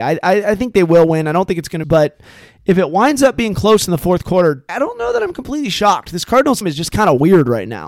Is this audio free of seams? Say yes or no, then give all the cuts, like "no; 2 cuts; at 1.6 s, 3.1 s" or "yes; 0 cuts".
no; 3 cuts; at 1.8 s, 4.7 s, 6.6 s